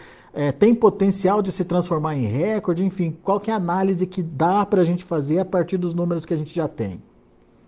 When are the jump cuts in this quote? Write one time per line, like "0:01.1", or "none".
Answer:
none

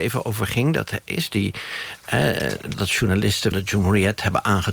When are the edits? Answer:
0:01.3
0:02.7
0:03.5

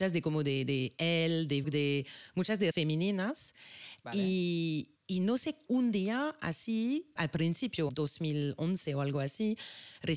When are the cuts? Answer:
0:01.6
0:02.7
0:05.0
0:05.7
0:07.2
0:07.9

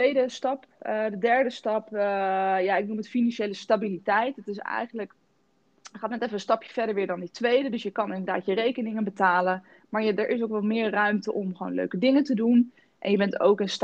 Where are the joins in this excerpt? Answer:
none

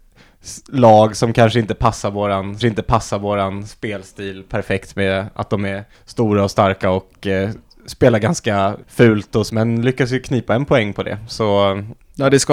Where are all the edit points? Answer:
0:02.6
0:05.9
0:08.8
0:09.5

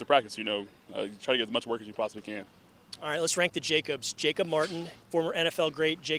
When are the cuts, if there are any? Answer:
0:05.0

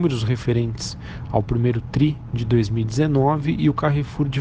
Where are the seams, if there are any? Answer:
none

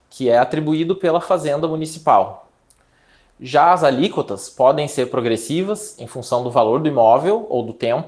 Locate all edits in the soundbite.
none

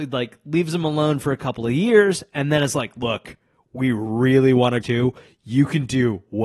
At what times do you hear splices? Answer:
0:04.8

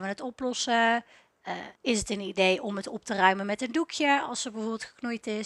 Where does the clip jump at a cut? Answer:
0:01.8

